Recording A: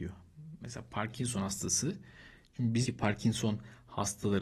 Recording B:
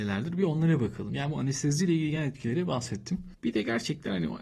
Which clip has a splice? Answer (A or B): A